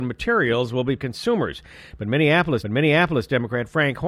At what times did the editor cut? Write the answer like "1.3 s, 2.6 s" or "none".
1.0 s, 2.6 s